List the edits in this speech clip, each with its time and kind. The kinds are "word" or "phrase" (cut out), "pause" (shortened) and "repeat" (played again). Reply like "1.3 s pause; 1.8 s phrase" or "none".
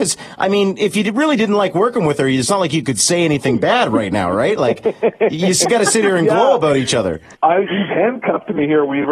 7.3 s pause